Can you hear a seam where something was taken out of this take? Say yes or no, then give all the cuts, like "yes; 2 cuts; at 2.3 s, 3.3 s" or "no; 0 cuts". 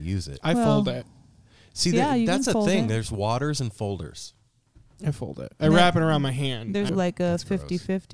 yes; 1 cut; at 6.9 s